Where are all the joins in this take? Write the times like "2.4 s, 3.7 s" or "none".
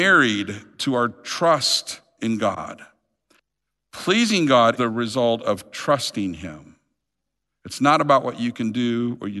4.8 s